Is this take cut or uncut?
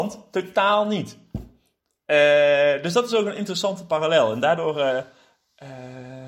uncut